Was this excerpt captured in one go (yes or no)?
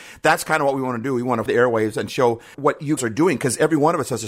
no